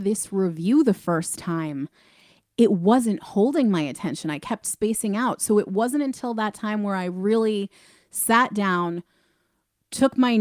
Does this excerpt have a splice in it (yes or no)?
no